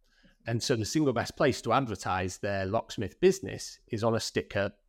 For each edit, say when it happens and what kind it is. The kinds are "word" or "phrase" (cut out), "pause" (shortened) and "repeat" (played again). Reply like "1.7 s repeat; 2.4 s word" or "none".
none